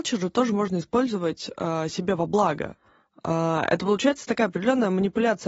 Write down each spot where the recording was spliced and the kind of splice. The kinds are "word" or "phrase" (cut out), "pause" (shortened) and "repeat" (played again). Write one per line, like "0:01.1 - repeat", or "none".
none